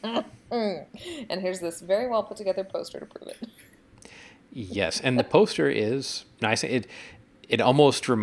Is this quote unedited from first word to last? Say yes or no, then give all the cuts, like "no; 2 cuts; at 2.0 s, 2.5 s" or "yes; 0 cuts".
yes; 0 cuts